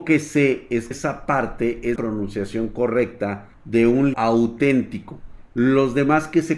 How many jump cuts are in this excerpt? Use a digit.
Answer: 4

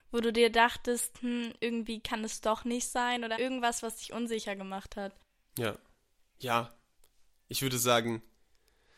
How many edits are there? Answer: 1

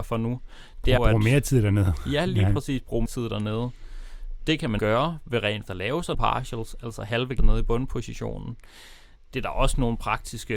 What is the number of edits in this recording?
6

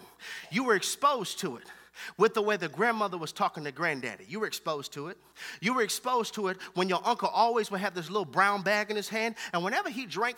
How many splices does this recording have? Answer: 0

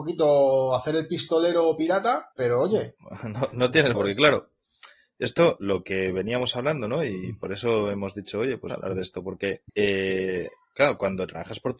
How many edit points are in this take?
5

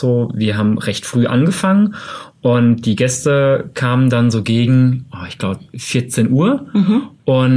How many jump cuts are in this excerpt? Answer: 1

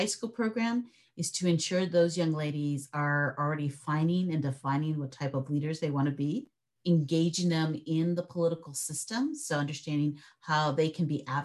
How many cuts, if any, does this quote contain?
0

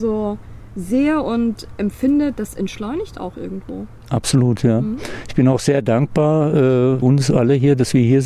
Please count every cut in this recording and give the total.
1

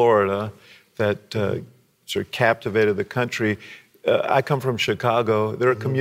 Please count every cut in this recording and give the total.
0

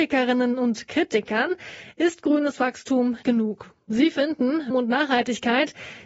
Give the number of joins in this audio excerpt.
2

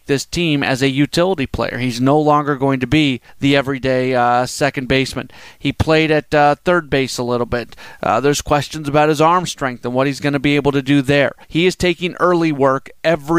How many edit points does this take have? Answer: 2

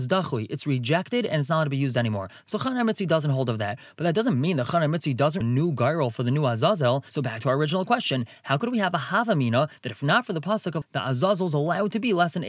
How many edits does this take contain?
2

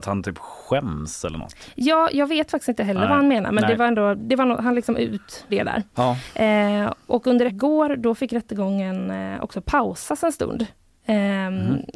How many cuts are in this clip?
2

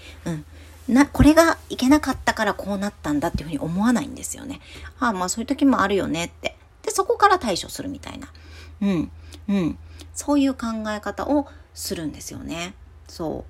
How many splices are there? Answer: 1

